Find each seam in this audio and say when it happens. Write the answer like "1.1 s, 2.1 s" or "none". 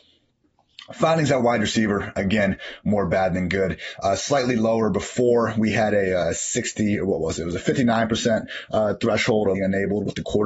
9.6 s